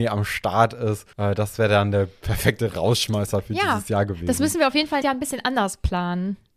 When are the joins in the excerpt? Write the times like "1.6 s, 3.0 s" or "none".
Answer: 1.1 s, 5.0 s

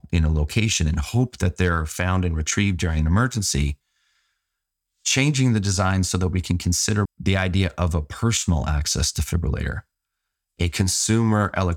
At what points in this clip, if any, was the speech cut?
7.1 s

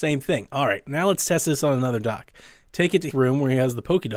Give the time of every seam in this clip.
3.1 s

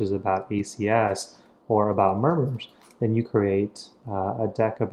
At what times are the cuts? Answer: 3.3 s

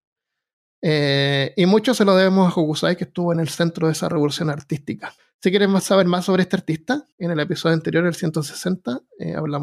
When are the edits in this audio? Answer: 5.2 s, 7.1 s

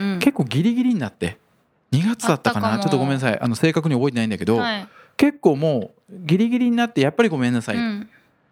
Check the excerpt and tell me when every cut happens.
none

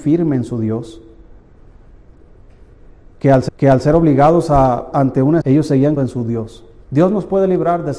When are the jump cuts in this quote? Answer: 3.5 s, 4.9 s, 5.4 s, 6.0 s, 6.8 s

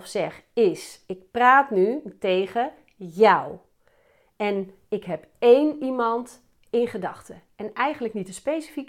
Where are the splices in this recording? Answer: none

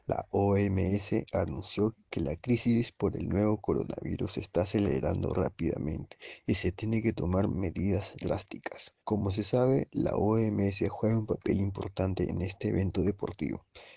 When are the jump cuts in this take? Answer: 9.0 s

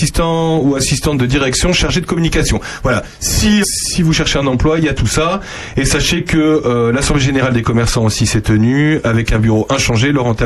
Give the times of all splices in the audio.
3.6 s

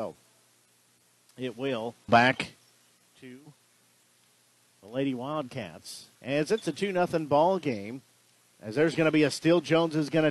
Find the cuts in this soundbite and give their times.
2.1 s, 6.1 s

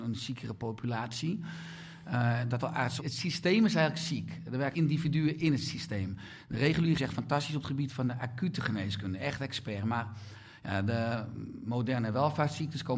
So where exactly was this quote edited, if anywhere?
2.6 s, 3.0 s, 4.7 s, 7.0 s

